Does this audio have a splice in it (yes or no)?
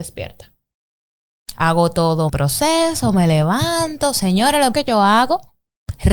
yes